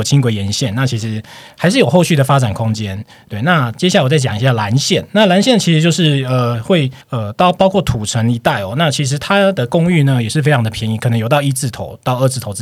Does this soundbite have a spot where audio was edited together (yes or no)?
yes